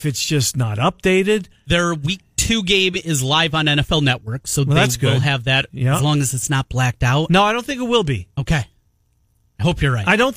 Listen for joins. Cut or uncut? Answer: uncut